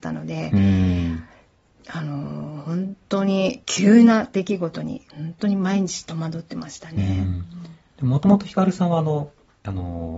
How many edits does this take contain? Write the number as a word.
two